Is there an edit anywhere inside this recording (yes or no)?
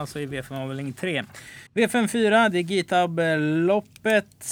yes